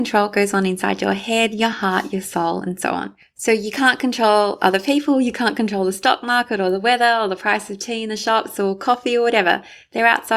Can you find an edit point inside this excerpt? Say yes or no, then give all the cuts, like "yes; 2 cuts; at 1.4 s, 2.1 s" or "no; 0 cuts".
no; 0 cuts